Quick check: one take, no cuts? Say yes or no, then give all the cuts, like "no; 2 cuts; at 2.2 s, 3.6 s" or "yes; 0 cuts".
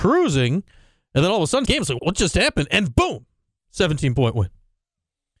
no; 3 cuts; at 1.7 s, 2.0 s, 2.9 s